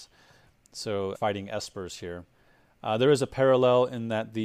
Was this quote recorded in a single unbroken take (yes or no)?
no